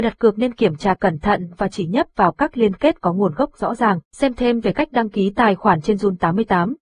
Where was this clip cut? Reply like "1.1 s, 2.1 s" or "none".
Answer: 4.1 s